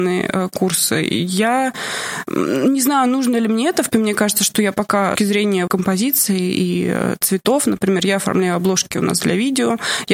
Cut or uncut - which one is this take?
cut